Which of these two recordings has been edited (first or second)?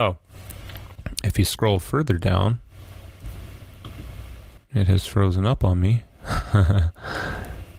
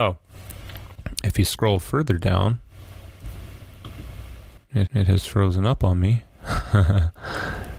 second